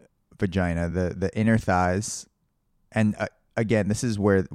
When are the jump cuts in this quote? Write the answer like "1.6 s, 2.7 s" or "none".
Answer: none